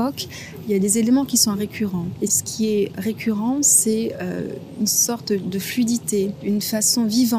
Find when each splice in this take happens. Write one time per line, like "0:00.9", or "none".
none